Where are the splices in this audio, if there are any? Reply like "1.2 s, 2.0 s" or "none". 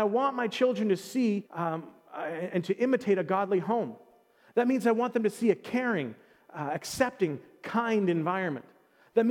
1.5 s